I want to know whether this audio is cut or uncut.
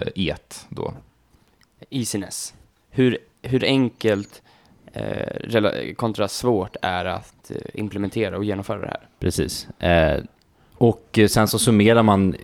uncut